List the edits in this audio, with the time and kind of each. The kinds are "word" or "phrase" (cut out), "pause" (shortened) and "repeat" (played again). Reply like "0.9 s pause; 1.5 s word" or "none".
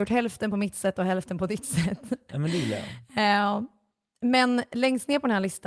none